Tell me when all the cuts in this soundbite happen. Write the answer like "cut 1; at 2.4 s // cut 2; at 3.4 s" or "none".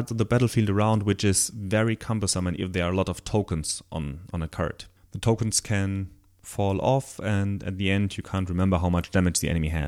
cut 1; at 2.6 s